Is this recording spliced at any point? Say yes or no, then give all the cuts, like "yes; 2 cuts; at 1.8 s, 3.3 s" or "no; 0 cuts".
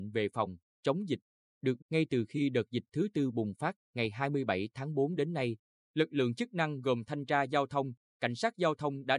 yes; 1 cut; at 1.8 s